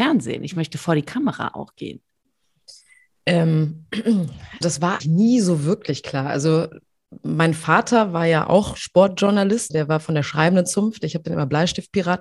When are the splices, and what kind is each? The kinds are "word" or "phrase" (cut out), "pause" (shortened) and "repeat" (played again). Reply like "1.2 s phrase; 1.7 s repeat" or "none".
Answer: 4.6 s word; 5.0 s word; 9.7 s word